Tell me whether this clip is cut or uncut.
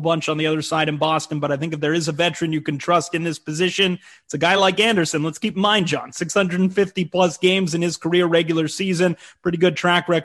uncut